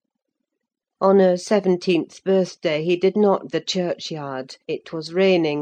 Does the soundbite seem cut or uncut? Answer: cut